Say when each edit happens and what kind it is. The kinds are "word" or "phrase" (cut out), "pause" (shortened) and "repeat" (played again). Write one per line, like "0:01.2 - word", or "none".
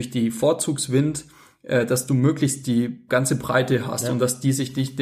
none